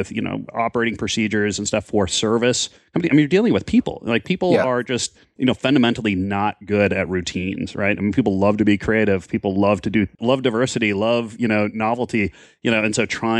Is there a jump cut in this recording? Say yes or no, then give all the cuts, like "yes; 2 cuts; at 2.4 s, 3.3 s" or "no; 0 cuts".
no; 0 cuts